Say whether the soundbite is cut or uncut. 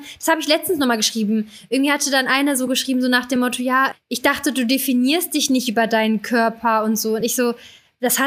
uncut